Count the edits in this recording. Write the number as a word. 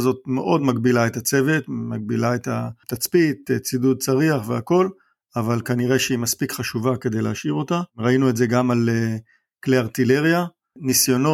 zero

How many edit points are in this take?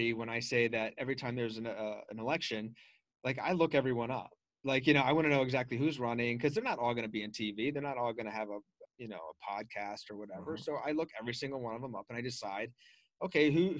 one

